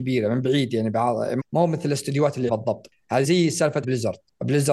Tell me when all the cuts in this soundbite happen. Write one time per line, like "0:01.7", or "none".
0:01.4
0:02.5
0:03.2
0:03.8